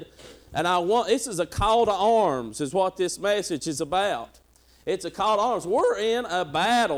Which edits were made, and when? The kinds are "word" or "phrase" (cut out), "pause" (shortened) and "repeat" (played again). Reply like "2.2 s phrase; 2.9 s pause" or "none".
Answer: none